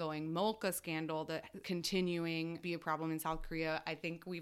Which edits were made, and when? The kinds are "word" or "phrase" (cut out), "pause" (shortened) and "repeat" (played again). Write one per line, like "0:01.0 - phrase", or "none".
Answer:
0:01.6 - word
0:02.6 - phrase